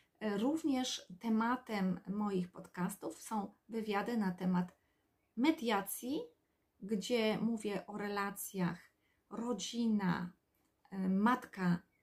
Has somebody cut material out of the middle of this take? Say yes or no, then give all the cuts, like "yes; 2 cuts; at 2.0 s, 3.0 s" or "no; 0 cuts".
no; 0 cuts